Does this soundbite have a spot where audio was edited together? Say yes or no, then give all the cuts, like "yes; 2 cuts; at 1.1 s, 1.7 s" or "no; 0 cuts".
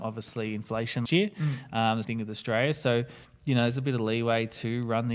yes; 2 cuts; at 1.1 s, 2.0 s